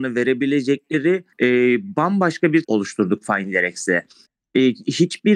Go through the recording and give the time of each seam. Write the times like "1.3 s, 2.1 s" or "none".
1.3 s, 2.6 s

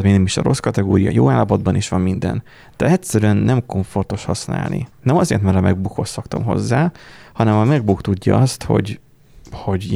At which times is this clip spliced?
none

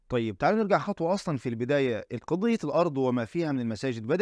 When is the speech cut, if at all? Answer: none

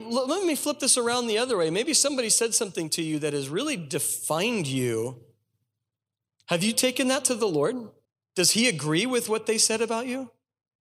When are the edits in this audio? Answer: 8.0 s

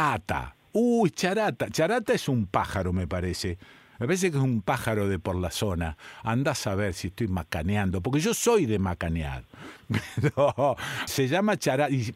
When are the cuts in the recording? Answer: 11.1 s

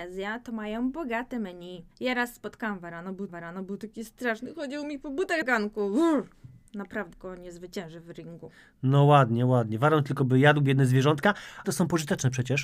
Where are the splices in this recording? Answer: 1.9 s, 3.3 s, 5.4 s, 7.1 s, 11.6 s

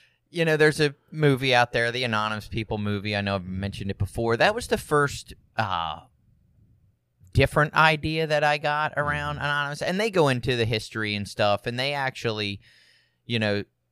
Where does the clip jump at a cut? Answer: none

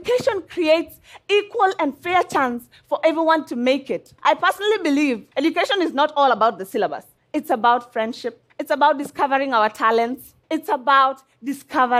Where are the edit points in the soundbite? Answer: 4.2 s, 5.3 s, 7.2 s, 8.5 s, 10.4 s

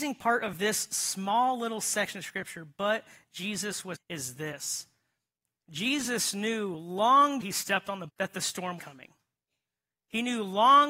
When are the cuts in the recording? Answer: 3.9 s, 7.4 s, 8.1 s, 8.8 s

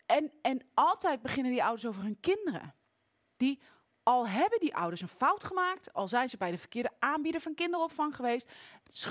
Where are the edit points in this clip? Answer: none

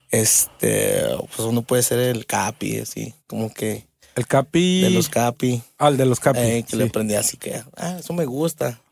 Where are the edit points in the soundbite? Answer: 3.2 s, 7.4 s

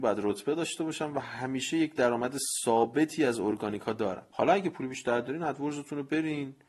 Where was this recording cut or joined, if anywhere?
none

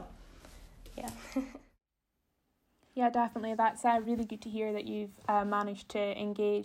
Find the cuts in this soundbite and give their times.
none

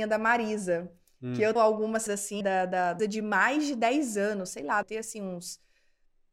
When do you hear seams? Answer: 1.6 s, 2.1 s, 2.4 s, 3.0 s, 4.8 s

